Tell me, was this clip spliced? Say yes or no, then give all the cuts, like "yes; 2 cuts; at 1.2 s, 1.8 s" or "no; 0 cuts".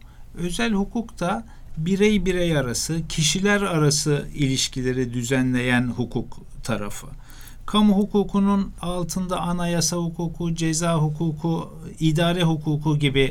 no; 0 cuts